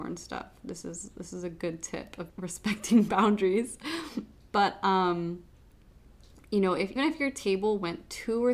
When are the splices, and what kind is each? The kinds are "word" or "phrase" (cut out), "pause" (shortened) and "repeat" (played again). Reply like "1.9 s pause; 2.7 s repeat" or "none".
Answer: 2.3 s word; 7.0 s word